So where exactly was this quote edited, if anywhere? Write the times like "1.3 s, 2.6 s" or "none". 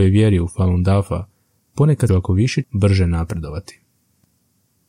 2.1 s, 2.6 s